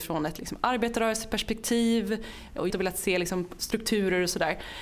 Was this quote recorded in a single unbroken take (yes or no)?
no